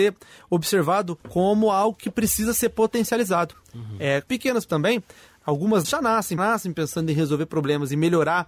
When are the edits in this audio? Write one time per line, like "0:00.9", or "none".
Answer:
0:01.2
0:04.3
0:04.7
0:05.8
0:06.4